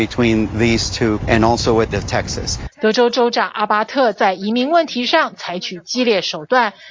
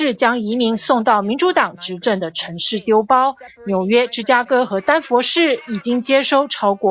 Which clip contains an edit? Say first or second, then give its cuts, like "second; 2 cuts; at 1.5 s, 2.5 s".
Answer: first; 2 cuts; at 1.2 s, 1.9 s